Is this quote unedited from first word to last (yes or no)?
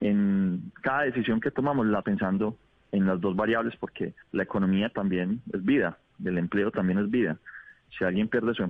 no